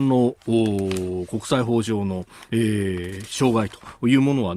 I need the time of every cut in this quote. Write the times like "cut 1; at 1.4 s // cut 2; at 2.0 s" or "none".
cut 1; at 2.5 s

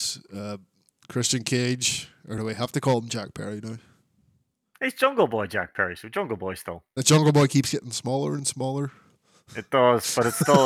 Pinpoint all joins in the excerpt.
none

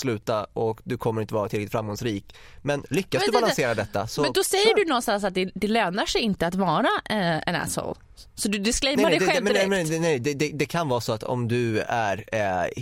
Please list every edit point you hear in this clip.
none

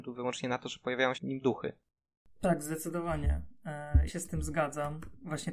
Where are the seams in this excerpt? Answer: cut 1; at 1.1 s // cut 2; at 4.1 s

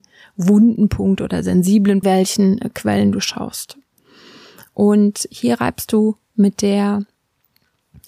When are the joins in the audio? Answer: cut 1; at 2.0 s

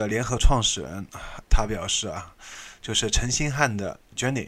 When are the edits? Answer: cut 1; at 1.4 s

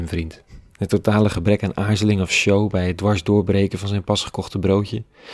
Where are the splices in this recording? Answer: none

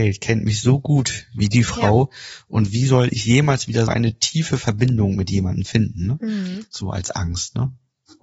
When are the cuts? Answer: cut 1; at 3.9 s

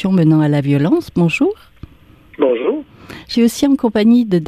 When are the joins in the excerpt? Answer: cut 1; at 3.3 s

